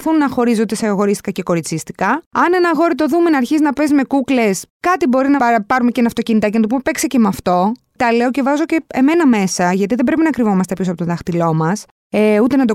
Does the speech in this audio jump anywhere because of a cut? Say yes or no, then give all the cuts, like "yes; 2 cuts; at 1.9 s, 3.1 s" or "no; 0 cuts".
yes; 3 cuts; at 2.3 s, 4.7 s, 5.4 s